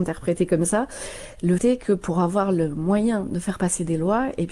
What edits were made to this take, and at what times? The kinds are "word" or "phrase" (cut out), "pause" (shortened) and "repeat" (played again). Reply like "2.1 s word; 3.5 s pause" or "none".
1.6 s word